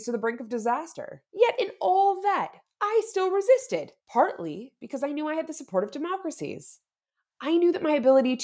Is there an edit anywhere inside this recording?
yes; 2 cuts; at 1.3 s, 4.0 s

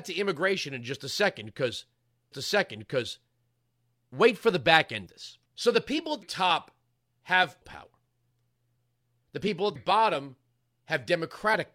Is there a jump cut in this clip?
yes; 6 cuts; at 2.3 s, 5.1 s, 5.5 s, 6.2 s, 7.6 s, 9.8 s

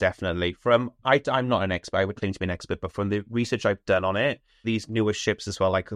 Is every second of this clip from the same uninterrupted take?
no; 3 cuts; at 1.0 s, 2.2 s, 4.6 s

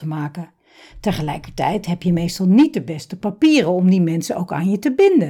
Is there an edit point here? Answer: no; 0 cuts

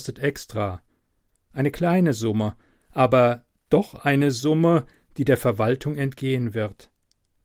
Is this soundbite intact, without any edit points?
yes; 0 cuts

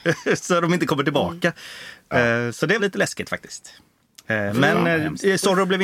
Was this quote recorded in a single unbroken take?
no; 1 cut; at 2.8 s

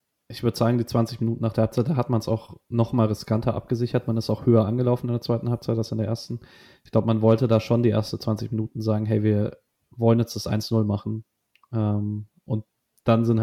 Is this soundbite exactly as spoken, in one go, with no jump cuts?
yes; 0 cuts

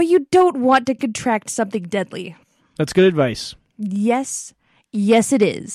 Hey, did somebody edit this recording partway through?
no; 0 cuts

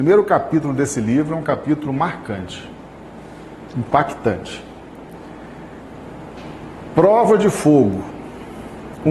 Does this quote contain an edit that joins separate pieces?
no; 0 cuts

